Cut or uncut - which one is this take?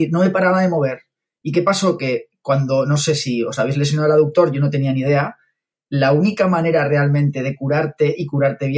uncut